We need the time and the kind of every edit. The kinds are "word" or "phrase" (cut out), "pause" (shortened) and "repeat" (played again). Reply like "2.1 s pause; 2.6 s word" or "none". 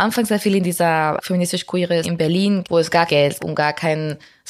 1.2 s word; 2.0 s word; 2.6 s word; 3.1 s word; 3.4 s word